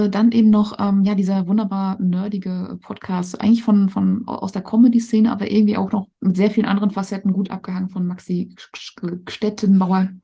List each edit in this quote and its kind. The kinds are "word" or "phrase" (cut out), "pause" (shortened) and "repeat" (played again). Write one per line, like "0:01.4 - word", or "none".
0:06.2 - pause